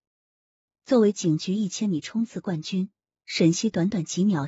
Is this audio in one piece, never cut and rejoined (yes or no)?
yes